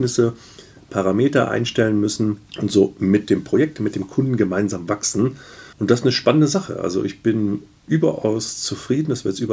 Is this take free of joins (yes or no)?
no